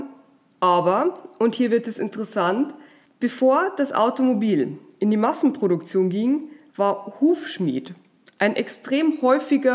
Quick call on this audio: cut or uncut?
cut